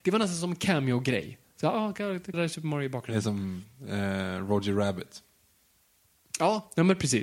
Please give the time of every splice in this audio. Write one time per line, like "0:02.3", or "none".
0:02.3